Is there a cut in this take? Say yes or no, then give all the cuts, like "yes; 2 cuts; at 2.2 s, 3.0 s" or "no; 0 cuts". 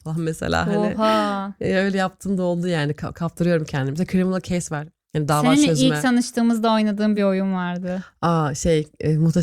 no; 0 cuts